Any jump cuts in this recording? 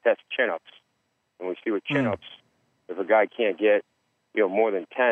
no; 0 cuts

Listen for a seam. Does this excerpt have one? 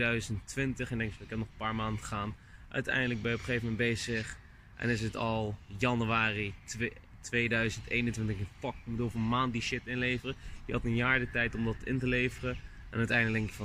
no; 0 cuts

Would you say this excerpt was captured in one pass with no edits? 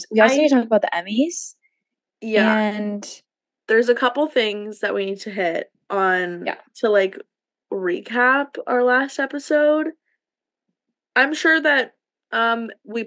no; 1 cut; at 5.7 s

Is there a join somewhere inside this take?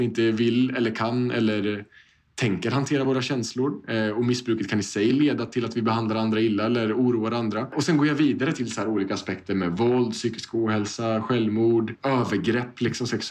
no; 0 cuts

